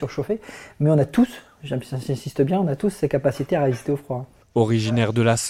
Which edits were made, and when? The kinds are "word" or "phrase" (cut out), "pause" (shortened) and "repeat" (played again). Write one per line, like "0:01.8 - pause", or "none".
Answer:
none